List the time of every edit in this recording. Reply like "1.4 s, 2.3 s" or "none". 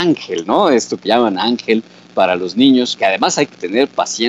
1.1 s, 2.0 s, 3.0 s

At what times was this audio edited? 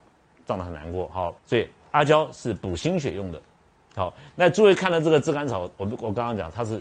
1.4 s

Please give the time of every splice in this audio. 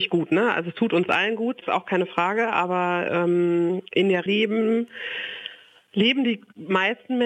1.6 s, 4.3 s

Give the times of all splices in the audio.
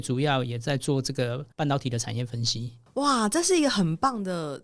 1.5 s

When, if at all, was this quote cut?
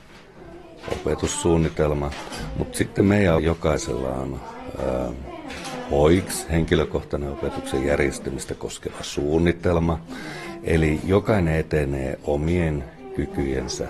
3.4 s

